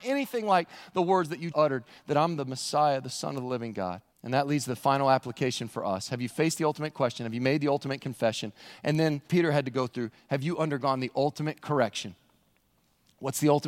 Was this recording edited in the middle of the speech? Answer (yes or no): yes